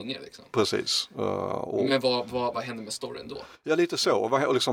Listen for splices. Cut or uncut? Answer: cut